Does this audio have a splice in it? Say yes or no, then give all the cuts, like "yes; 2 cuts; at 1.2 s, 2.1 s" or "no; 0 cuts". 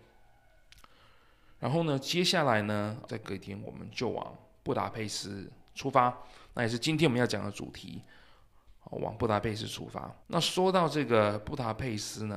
yes; 2 cuts; at 3.1 s, 10.2 s